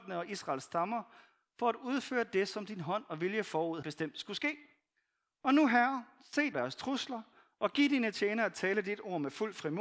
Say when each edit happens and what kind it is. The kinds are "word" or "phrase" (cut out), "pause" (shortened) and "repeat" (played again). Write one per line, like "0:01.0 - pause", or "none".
0:03.8 - word
0:06.5 - word